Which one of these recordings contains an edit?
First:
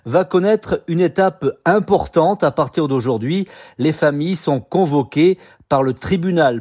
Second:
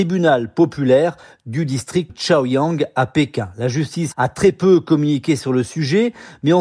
second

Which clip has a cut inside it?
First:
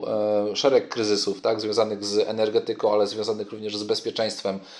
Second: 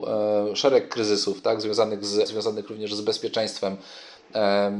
second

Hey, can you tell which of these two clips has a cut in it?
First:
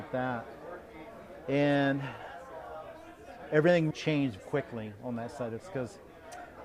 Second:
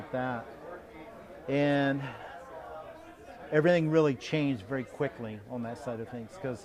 first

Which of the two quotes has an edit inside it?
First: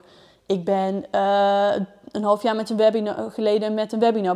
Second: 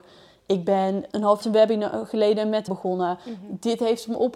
second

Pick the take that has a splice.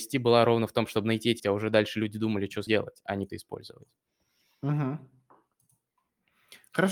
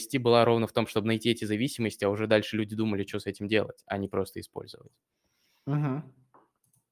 first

